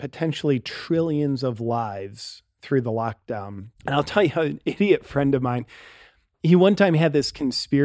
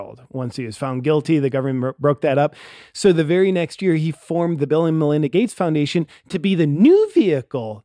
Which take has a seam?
first; 1 cut; at 3.7 s

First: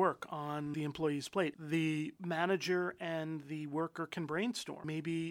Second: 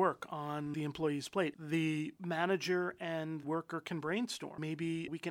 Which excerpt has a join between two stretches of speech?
second; 1 cut; at 3.4 s

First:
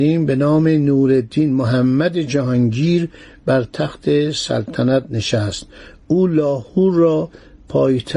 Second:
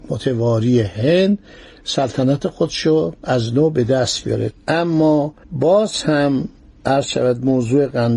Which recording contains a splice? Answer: second; 1 cut; at 5.4 s

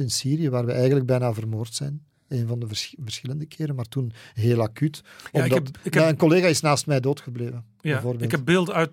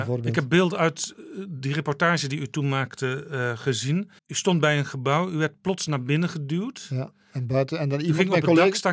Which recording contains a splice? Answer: second; 2 cuts; at 4.2 s, 5.6 s

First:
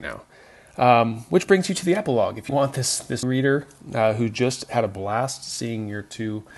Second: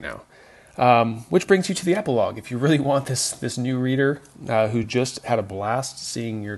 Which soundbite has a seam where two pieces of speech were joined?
first; 2 cuts; at 2.5 s, 3.2 s

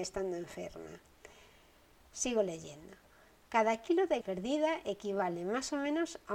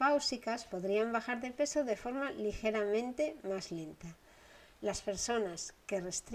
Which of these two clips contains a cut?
first; 1 cut; at 4.2 s

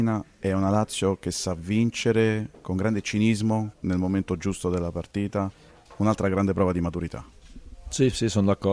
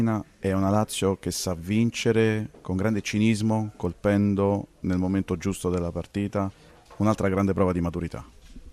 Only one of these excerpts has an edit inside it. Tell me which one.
first; 1 cut; at 3.7 s

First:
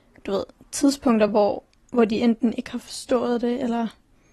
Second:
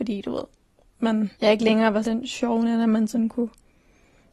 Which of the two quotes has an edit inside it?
second; 2 cuts; at 1.3 s, 2.0 s

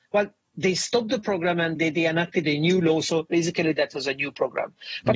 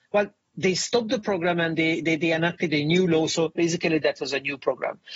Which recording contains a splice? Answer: first; 1 cut; at 1.8 s

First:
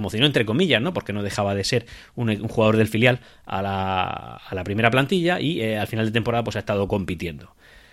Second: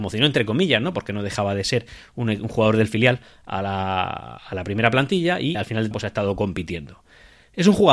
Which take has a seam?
second; 2 cuts; at 5.5 s, 5.9 s

